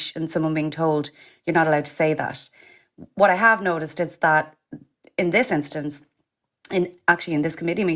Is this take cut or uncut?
uncut